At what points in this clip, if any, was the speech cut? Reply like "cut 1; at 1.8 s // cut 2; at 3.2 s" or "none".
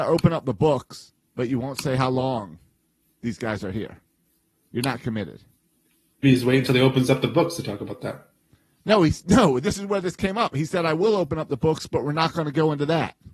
cut 1; at 6.2 s